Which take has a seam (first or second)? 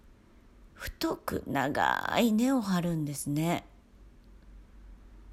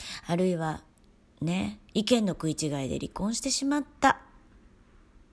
second